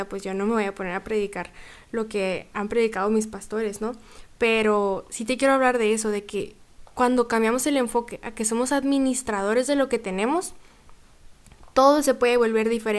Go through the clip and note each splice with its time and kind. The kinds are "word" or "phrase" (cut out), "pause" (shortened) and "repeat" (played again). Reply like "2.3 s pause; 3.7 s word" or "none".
none